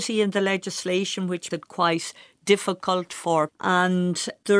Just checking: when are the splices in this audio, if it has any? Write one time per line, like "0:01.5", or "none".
0:01.5
0:03.5